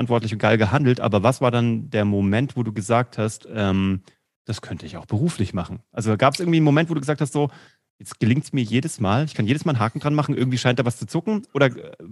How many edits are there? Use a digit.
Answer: 0